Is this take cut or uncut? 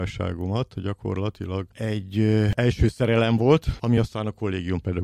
uncut